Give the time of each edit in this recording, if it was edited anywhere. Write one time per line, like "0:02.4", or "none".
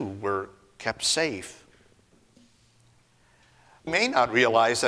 0:03.9